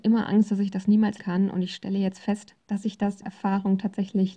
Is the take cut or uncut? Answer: cut